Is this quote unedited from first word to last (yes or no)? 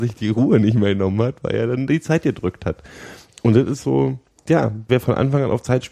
no